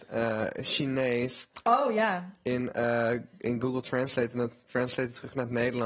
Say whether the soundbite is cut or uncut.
uncut